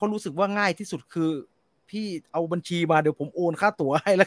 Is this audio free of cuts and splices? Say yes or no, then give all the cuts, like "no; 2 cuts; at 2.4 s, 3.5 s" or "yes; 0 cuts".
yes; 0 cuts